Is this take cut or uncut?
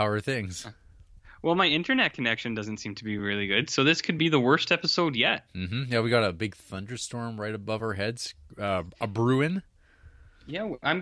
uncut